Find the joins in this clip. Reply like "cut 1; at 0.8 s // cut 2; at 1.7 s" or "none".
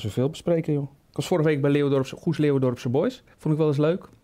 cut 1; at 3.3 s